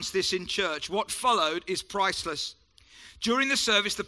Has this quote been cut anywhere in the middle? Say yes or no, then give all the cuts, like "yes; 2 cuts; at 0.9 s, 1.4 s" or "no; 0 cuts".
no; 0 cuts